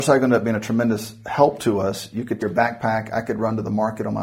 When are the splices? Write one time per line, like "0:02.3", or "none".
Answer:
0:02.4